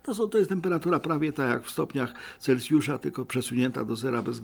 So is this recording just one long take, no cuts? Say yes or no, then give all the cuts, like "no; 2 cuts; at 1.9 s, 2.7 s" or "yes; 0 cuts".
yes; 0 cuts